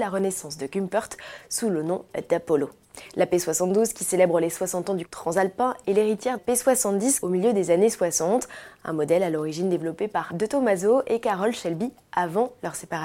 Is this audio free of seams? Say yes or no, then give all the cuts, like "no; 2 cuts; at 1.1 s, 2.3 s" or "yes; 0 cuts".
no; 4 cuts; at 5.1 s, 6.4 s, 7.2 s, 10.3 s